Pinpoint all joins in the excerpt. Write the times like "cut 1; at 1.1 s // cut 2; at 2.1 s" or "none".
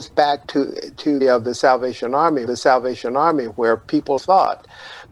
cut 1; at 1.2 s // cut 2; at 2.5 s // cut 3; at 4.2 s